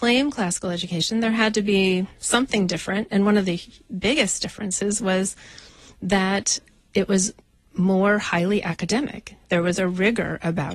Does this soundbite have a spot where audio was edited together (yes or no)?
no